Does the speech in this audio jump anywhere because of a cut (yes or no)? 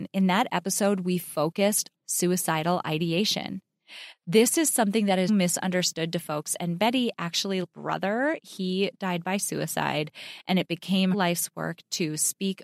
yes